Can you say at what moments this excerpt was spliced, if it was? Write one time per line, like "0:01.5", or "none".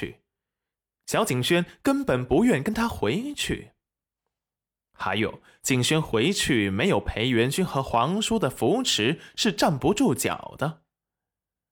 none